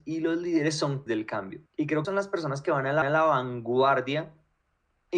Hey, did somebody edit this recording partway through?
yes; 4 cuts; at 1.1 s, 1.7 s, 2.0 s, 3.0 s

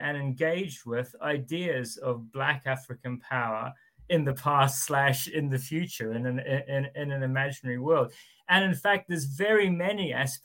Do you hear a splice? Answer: no; 0 cuts

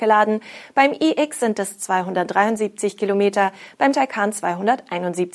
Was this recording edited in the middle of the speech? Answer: no; 0 cuts

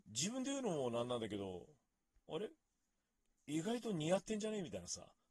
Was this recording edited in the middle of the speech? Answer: no; 0 cuts

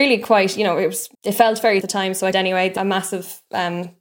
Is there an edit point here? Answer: yes; 4 cuts; at 1.1 s, 1.8 s, 2.3 s, 2.8 s

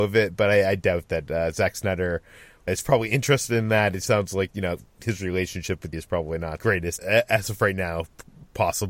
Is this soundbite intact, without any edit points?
no; 6 cuts; at 2.7 s, 4.1 s, 4.5 s, 5.9 s, 6.6 s, 7.0 s

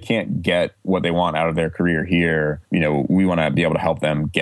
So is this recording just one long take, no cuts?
no; 1 cut; at 2.6 s

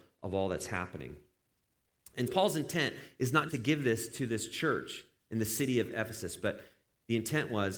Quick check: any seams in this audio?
yes; 2 cuts; at 2.3 s, 3.5 s

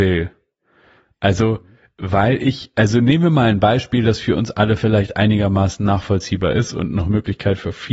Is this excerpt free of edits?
yes; 0 cuts

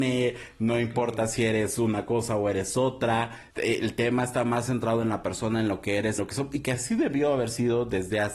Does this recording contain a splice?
yes; 2 cuts; at 3.5 s, 6.2 s

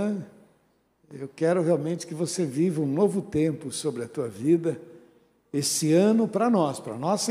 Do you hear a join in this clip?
no; 0 cuts

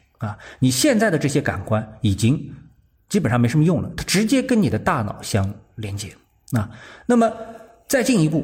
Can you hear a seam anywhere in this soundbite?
no; 0 cuts

